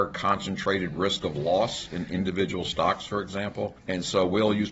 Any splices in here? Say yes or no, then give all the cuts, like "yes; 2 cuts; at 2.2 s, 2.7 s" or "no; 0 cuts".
no; 0 cuts